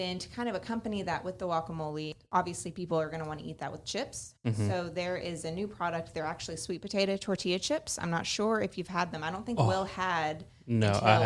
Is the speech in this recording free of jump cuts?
yes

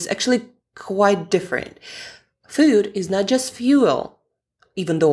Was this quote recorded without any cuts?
yes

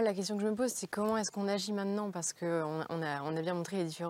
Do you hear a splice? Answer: no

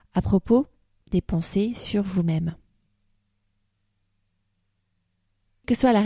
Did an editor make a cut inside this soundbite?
no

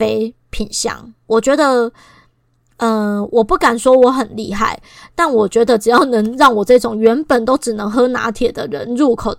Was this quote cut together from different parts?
no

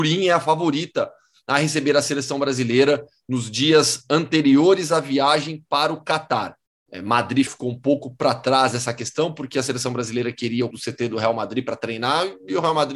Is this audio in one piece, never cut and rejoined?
no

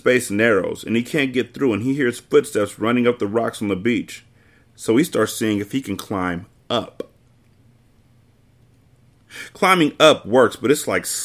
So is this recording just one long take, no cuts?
yes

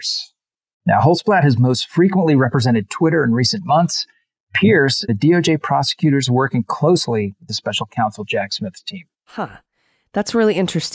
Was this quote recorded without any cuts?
no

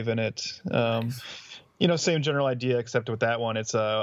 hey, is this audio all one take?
yes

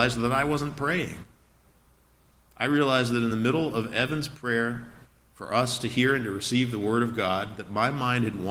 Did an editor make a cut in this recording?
no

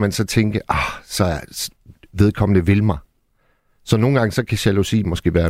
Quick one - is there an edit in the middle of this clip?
no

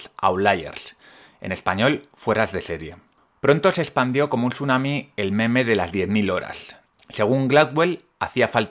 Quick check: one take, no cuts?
yes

